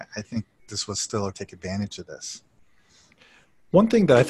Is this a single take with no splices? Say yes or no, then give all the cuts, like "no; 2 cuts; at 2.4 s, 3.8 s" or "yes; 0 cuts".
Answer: no; 1 cut; at 1.3 s